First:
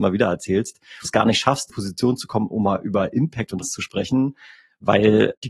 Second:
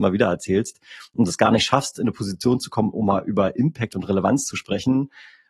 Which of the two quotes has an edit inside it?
first; 3 cuts; at 1.0 s, 1.7 s, 3.6 s

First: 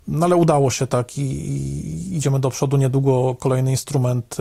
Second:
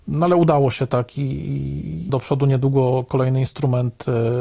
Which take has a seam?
second; 1 cut; at 2.1 s

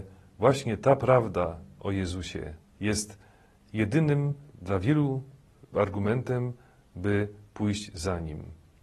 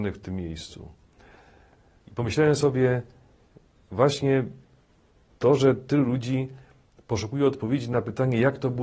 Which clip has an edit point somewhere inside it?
first; 2 cuts; at 2.6 s, 5.7 s

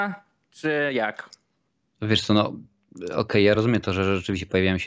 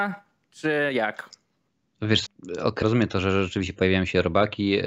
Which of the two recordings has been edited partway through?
second; 2 cuts; at 2.3 s, 2.8 s

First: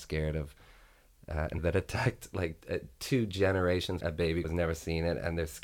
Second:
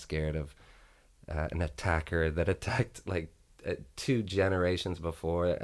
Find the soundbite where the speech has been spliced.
first; 4 cuts; at 1.6 s, 2.6 s, 4.0 s, 4.4 s

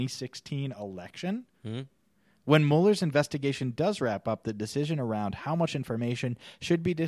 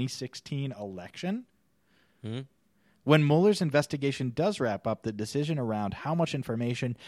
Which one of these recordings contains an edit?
first; 1 cut; at 1.5 s

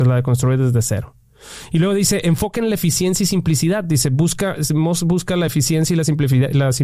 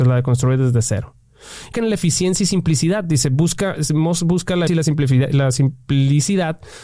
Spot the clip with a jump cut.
second; 2 cuts; at 1.7 s, 4.7 s

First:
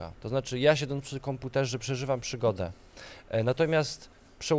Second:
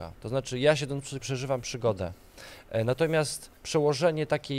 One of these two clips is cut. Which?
second; 2 cuts; at 1.2 s, 3.6 s

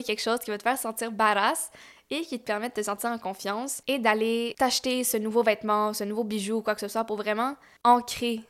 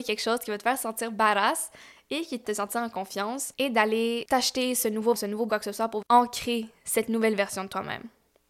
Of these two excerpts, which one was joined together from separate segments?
second; 4 cuts; at 2.4 s, 5.1 s, 5.5 s, 6.0 s

